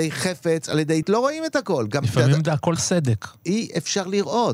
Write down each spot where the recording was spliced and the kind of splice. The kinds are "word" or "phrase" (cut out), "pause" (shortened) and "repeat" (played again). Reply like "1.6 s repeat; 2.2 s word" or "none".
1.0 s word; 2.8 s word